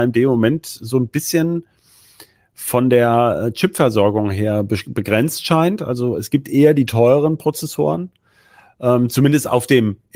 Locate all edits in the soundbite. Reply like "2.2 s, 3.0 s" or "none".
none